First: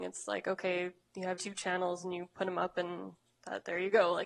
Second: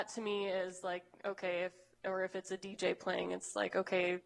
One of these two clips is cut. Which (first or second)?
first